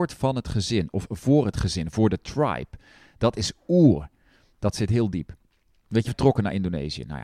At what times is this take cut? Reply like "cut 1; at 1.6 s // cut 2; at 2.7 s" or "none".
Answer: cut 1; at 6.1 s